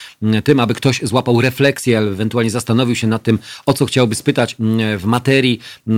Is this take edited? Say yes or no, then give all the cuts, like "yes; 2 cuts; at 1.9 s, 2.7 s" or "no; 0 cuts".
no; 0 cuts